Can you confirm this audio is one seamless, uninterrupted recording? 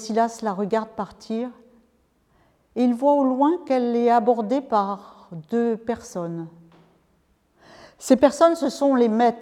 yes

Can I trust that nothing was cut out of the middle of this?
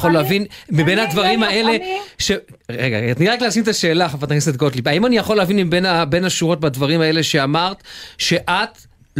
no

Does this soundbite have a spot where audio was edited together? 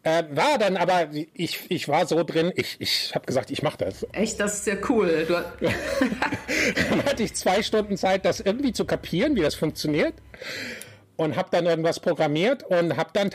no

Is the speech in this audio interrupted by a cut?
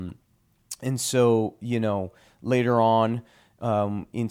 no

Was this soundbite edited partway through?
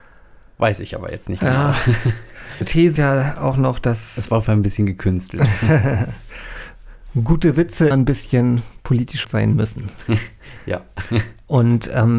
yes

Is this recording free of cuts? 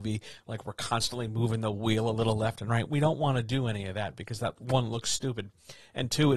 yes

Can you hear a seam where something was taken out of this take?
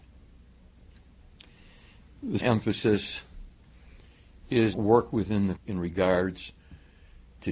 yes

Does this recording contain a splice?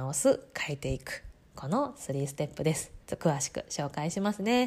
yes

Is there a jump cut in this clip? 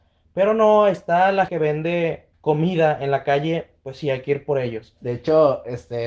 yes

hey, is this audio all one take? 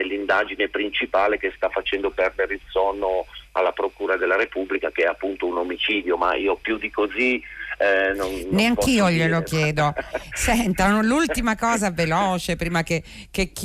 yes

